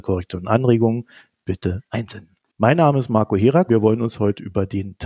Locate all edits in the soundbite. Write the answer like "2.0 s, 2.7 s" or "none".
1.9 s, 3.7 s